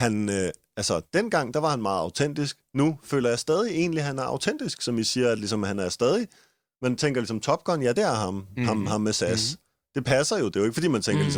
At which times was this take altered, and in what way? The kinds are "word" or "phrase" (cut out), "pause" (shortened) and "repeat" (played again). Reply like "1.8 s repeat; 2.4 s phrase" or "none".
none